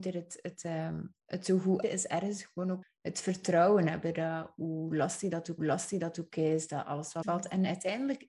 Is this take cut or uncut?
cut